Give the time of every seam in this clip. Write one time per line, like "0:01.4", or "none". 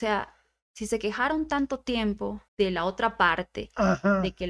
0:02.5